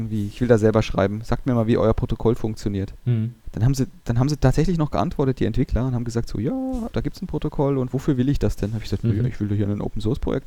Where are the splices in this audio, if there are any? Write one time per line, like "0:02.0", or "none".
0:03.4
0:06.9